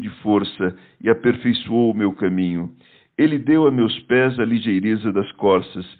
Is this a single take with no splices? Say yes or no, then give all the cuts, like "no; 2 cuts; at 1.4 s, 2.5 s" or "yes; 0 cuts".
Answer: yes; 0 cuts